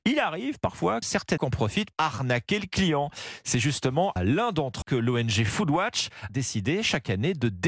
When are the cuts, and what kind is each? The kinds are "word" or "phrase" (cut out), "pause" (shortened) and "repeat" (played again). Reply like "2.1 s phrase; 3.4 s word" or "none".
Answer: 1.0 s word; 1.4 s word; 1.9 s word; 4.2 s word; 4.8 s word; 6.3 s word